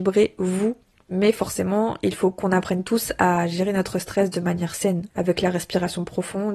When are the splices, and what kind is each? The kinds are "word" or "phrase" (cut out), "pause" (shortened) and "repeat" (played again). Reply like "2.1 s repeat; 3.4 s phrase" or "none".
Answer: 5.1 s pause